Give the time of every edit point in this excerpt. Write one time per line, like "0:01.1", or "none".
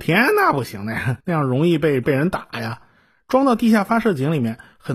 0:01.2